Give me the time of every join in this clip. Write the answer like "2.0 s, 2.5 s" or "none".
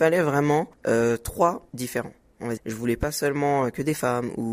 1.7 s, 2.6 s